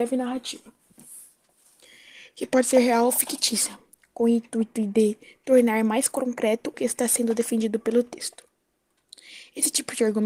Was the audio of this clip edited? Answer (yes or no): yes